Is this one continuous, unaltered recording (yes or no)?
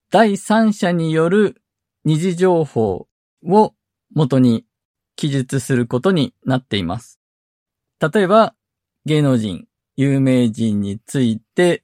yes